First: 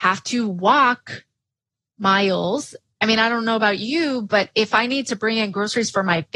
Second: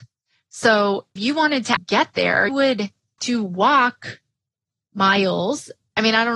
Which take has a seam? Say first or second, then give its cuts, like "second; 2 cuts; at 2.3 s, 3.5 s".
second; 4 cuts; at 1.2 s, 1.8 s, 2.5 s, 3.2 s